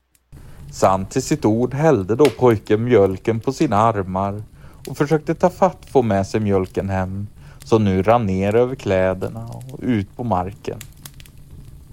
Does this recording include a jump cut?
no; 0 cuts

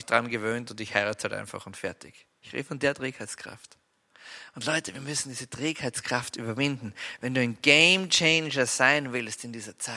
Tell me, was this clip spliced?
no; 0 cuts

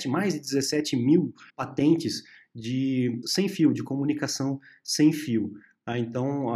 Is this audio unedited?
no; 2 cuts; at 1.5 s, 3.2 s

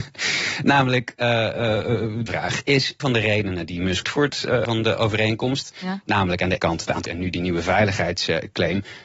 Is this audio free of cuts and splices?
no; 6 cuts; at 2.3 s, 3.0 s, 4.0 s, 4.6 s, 6.6 s, 7.1 s

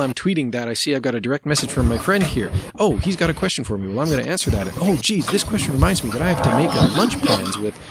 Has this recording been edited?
no; 0 cuts

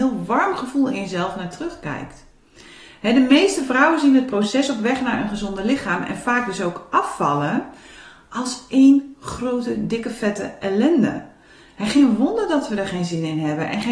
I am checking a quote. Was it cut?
no; 0 cuts

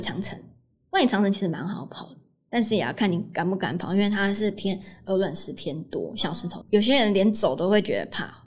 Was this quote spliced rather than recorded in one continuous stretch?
yes; 1 cut; at 6.6 s

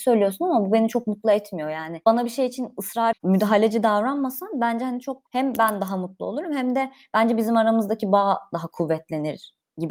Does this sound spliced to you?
yes; 2 cuts; at 3.1 s, 5.3 s

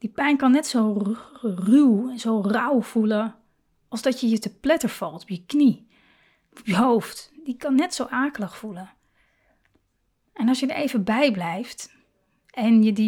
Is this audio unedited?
yes; 0 cuts

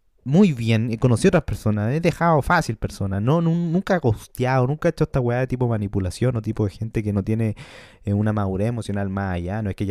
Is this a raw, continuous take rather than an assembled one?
yes; 0 cuts

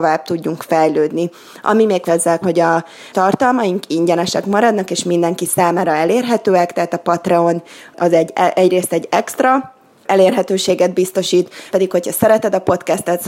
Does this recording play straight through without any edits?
no; 4 cuts; at 2.1 s, 2.4 s, 3.1 s, 11.7 s

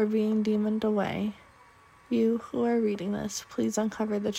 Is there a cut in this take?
no; 0 cuts

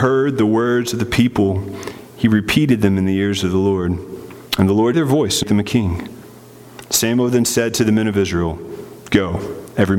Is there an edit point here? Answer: yes; 2 cuts; at 4.9 s, 5.4 s

